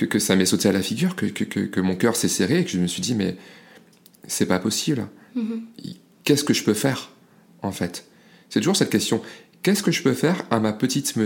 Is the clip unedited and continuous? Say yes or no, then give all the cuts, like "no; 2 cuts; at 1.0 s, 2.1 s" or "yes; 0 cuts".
yes; 0 cuts